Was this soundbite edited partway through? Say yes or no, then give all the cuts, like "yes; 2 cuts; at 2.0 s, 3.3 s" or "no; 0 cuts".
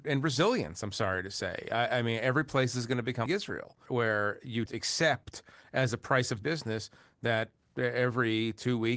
yes; 4 cuts; at 3.3 s, 3.9 s, 4.7 s, 6.4 s